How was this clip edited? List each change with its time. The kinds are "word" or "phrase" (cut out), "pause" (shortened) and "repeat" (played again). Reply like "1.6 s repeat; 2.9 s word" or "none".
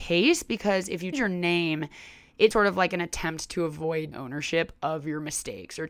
1.1 s word; 2.5 s word; 4.1 s word